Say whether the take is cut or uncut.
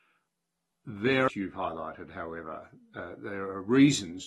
cut